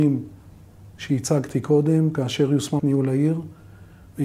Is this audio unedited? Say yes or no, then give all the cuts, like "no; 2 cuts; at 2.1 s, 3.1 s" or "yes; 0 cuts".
no; 1 cut; at 2.8 s